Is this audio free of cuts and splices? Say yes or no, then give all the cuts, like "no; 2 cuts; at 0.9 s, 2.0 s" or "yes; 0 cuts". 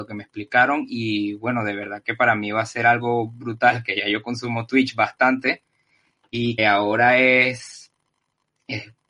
no; 1 cut; at 6.6 s